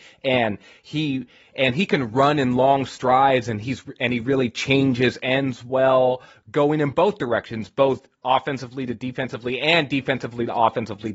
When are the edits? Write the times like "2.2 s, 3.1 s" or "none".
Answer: none